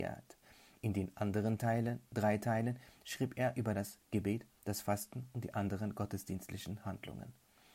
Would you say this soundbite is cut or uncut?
uncut